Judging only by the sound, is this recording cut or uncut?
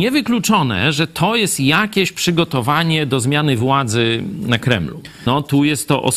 uncut